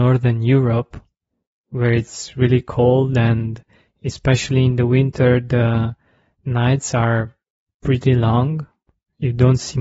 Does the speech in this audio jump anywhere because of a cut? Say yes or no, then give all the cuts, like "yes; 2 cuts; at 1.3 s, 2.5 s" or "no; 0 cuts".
no; 0 cuts